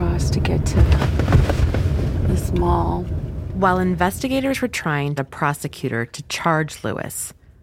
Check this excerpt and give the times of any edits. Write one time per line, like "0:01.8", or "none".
0:05.2